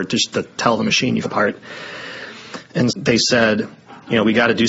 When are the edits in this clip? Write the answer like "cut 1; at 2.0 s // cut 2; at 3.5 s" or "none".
cut 1; at 1.2 s // cut 2; at 2.9 s